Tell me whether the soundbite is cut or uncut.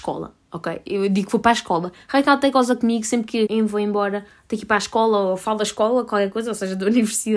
cut